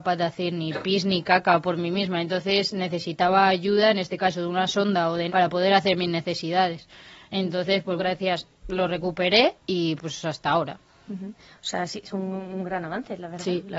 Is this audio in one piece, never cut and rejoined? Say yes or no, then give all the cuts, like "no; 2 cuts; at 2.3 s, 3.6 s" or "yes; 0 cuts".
no; 3 cuts; at 5.3 s, 8.0 s, 9.6 s